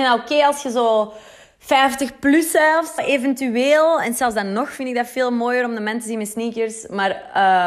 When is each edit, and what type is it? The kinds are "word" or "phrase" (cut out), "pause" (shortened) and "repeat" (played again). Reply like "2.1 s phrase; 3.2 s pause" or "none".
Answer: 1.4 s pause; 3.0 s word